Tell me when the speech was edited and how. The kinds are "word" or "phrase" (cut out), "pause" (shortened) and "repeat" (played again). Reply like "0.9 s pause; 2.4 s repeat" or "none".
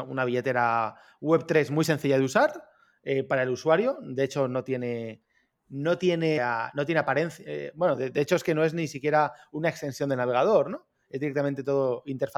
6.4 s word